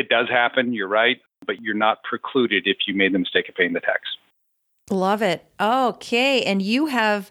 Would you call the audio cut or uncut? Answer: uncut